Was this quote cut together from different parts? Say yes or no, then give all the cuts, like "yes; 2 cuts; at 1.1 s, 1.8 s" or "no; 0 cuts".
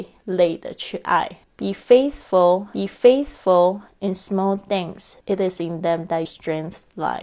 yes; 4 cuts; at 1.4 s, 2.7 s, 5.2 s, 6.2 s